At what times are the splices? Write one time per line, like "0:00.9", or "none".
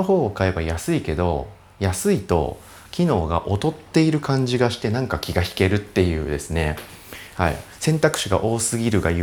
none